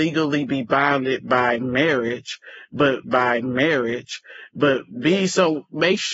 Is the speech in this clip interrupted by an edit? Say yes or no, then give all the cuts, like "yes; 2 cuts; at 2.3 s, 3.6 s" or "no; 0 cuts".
yes; 1 cut; at 3.0 s